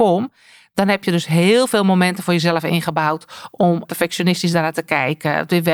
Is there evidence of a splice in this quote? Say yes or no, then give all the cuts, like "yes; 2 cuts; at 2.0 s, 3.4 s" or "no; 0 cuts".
yes; 1 cut; at 3.8 s